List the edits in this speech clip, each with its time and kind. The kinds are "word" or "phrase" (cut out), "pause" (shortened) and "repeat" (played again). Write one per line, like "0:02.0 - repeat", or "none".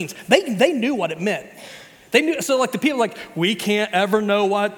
none